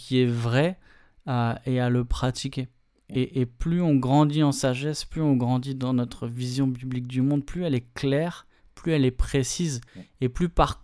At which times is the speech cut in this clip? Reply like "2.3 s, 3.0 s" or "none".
9.9 s